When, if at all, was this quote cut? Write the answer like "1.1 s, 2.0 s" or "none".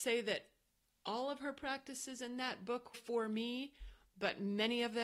2.9 s